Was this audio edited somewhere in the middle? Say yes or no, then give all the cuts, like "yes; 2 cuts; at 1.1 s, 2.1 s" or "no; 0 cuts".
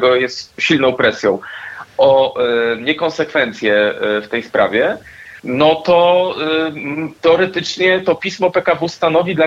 yes; 1 cut; at 5.4 s